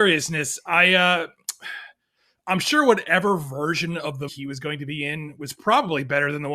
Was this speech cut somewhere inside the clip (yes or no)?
yes